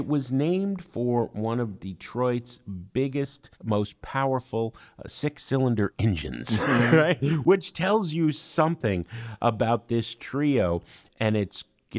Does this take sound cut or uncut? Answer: cut